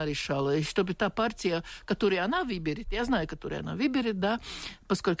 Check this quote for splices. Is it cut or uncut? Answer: uncut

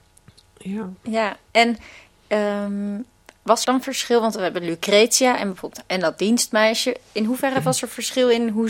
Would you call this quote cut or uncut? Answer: cut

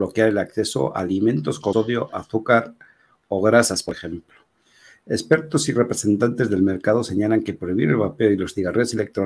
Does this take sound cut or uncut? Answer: cut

